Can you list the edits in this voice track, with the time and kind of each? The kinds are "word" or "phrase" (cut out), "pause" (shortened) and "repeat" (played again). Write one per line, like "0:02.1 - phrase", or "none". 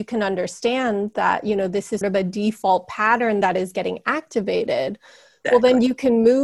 0:02.0 - word